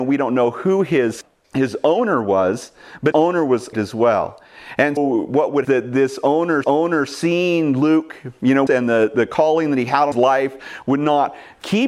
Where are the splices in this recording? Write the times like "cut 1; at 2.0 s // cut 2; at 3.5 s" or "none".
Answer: cut 1; at 1.4 s // cut 2; at 3.1 s // cut 3; at 3.7 s // cut 4; at 5.0 s // cut 5; at 5.6 s // cut 6; at 6.6 s // cut 7; at 8.7 s // cut 8; at 10.1 s